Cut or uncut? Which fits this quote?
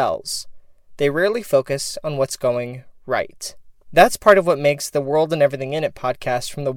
cut